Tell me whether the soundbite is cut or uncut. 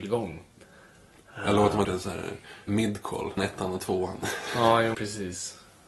cut